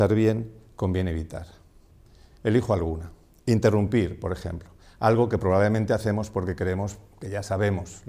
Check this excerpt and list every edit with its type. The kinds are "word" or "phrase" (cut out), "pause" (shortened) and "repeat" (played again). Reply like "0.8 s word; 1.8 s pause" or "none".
none